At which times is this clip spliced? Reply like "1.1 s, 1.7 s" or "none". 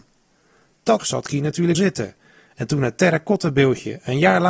1.0 s, 1.7 s